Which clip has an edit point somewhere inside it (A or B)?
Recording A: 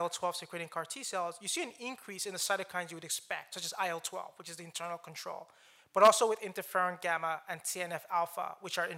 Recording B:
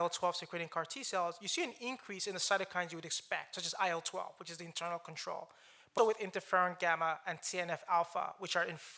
B